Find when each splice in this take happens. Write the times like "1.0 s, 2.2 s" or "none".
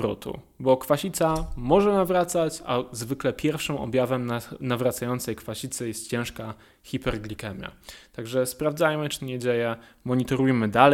9.2 s